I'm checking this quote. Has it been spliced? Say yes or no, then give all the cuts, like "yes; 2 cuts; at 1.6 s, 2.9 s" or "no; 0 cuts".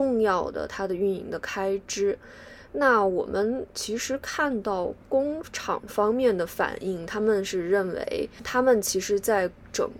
no; 0 cuts